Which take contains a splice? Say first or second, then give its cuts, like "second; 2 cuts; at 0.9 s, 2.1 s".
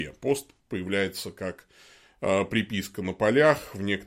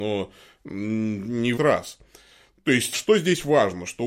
second; 2 cuts; at 1.5 s, 2.9 s